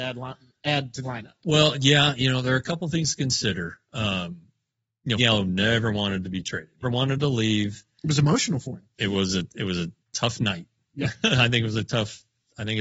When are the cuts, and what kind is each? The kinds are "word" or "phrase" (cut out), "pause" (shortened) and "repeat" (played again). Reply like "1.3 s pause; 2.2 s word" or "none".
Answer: 1.0 s word; 5.2 s phrase; 6.8 s word; 10.0 s pause